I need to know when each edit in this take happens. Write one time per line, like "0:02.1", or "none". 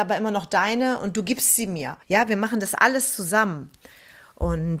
0:01.0
0:02.0